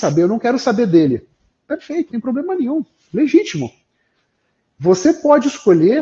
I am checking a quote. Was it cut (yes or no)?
yes